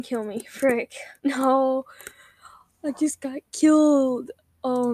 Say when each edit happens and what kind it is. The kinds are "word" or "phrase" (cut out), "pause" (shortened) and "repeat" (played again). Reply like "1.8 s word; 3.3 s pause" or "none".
1.2 s pause